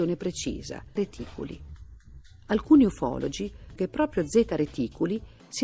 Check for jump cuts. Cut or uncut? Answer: cut